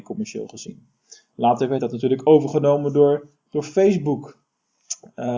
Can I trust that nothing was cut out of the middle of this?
yes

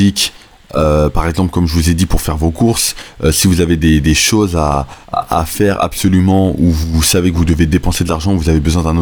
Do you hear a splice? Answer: yes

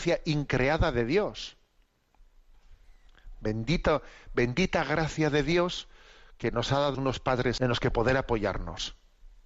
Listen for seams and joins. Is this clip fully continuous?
no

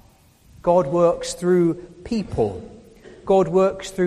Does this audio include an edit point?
no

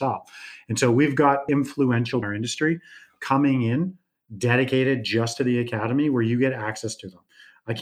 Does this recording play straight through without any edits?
no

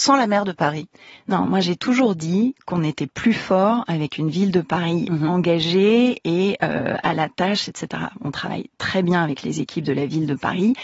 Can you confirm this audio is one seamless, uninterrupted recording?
yes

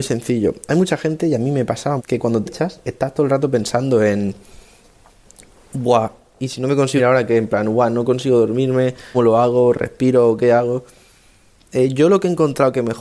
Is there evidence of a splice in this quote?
yes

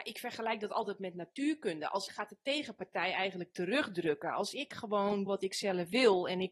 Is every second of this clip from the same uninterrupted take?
no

